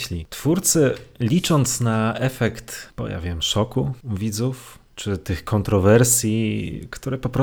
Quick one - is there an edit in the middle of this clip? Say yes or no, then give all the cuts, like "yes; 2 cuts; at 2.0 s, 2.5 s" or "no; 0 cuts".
no; 0 cuts